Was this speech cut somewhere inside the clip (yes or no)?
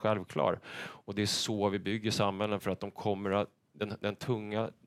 no